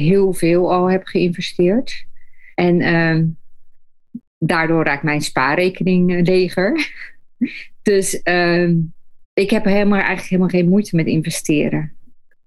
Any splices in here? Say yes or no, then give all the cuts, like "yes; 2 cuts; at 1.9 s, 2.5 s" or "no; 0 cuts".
yes; 3 cuts; at 2.5 s, 4.3 s, 9.2 s